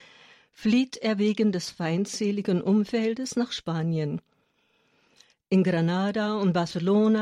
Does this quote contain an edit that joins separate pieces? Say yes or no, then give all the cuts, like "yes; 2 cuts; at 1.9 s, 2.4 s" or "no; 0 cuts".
no; 0 cuts